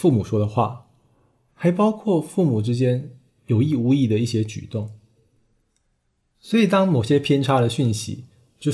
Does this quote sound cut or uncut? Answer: uncut